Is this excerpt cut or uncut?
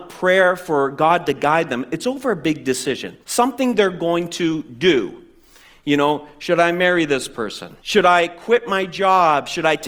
cut